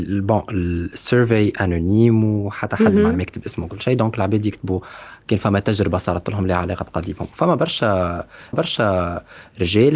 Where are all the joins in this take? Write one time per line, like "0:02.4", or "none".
0:08.5